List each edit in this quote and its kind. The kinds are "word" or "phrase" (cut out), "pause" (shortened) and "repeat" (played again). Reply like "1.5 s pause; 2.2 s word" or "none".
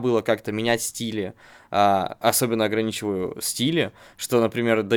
none